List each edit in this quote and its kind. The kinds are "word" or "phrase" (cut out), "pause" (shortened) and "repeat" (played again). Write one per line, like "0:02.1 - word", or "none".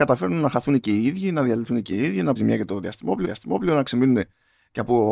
0:02.4 - word
0:03.2 - repeat